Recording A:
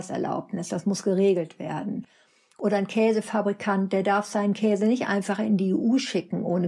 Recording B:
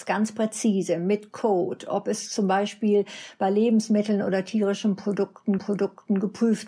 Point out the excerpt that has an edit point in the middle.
B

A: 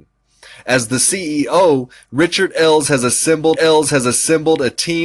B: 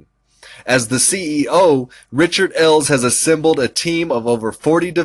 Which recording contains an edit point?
A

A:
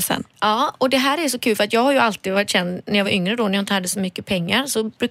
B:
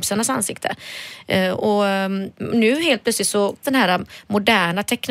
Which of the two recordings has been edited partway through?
B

